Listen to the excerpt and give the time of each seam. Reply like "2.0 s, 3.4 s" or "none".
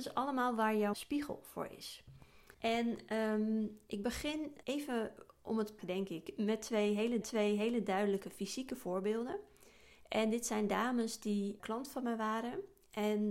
0.9 s, 2.5 s, 4.6 s, 5.8 s, 7.2 s, 11.6 s